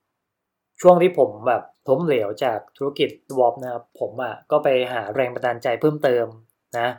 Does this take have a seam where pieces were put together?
yes; 3 cuts; at 1.7 s, 3.3 s, 3.9 s

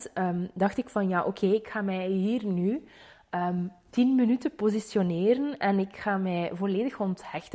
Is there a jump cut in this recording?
no; 0 cuts

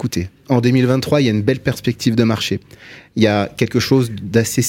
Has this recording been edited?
no; 0 cuts

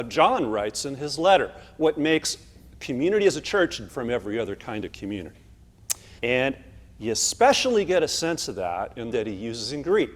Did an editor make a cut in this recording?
yes; 3 cuts; at 3.9 s, 6.2 s, 9.1 s

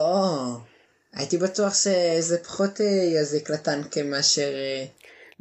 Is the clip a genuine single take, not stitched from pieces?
yes; 0 cuts

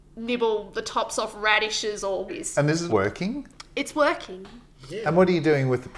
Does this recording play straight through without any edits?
no; 2 cuts; at 2.3 s, 2.9 s

